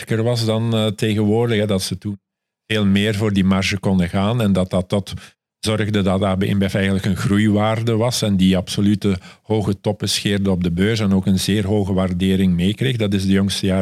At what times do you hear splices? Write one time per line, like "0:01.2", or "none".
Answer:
none